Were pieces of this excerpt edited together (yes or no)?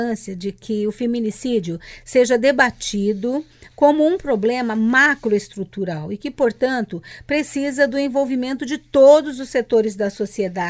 no